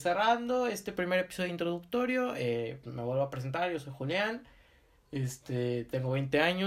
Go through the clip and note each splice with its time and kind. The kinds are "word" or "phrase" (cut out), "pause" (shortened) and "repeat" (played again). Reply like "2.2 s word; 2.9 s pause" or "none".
2.8 s word

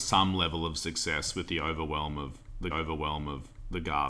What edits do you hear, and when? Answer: 2.7 s repeat

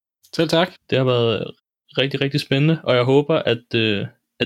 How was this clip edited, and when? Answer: none

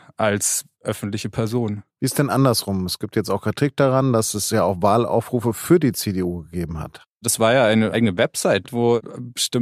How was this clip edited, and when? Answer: 1.9 s pause

